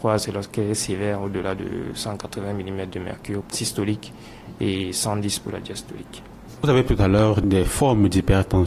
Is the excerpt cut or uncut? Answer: cut